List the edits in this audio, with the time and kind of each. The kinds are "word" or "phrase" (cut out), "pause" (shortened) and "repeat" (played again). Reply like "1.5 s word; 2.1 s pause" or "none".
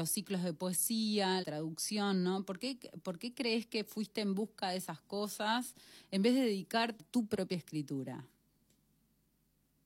1.4 s word; 7.0 s phrase